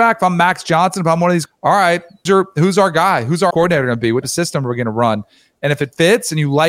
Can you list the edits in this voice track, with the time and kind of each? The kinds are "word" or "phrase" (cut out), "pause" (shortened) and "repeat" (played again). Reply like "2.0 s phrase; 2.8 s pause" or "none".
1.5 s word; 2.3 s word; 3.5 s word; 4.2 s word